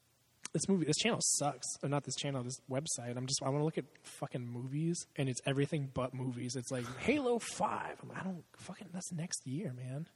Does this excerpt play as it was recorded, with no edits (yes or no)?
no